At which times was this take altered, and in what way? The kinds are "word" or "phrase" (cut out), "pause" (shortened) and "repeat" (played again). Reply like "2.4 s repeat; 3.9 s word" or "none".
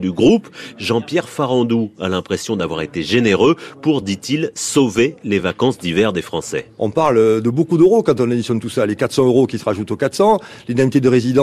none